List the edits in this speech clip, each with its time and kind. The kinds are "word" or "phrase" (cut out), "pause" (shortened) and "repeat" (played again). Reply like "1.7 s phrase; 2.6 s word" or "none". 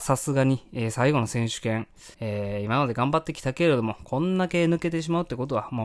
2.1 s pause